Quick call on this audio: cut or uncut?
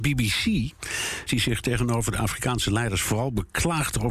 cut